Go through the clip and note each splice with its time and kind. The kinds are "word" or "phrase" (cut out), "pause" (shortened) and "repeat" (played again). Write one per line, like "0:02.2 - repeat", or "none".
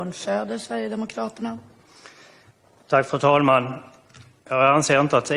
none